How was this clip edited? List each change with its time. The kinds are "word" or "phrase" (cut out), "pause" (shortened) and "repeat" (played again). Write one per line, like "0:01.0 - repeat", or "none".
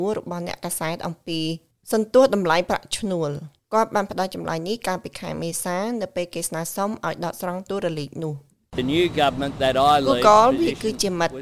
none